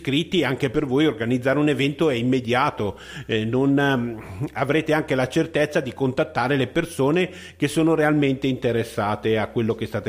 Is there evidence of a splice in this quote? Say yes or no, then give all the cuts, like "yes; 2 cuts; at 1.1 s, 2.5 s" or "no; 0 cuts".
no; 0 cuts